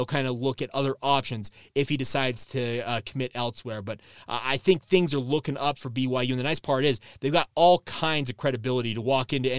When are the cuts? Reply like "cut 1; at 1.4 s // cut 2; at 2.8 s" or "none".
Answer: none